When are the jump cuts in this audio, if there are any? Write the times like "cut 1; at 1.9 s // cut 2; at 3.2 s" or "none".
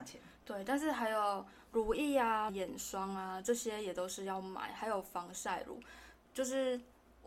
cut 1; at 2.5 s